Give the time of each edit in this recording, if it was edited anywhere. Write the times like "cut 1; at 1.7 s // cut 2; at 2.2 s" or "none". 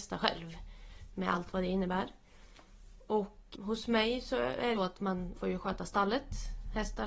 cut 1; at 3.5 s // cut 2; at 4.7 s // cut 3; at 5.3 s